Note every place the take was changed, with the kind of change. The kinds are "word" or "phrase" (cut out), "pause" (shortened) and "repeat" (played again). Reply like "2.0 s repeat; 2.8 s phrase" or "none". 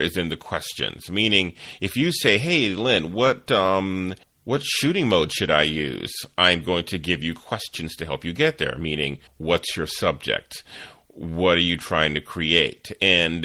4.2 s pause; 9.3 s pause